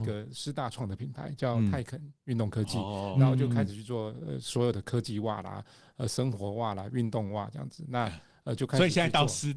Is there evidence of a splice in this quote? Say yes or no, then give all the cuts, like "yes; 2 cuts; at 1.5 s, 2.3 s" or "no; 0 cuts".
no; 0 cuts